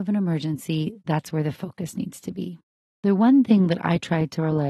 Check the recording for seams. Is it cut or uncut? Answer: cut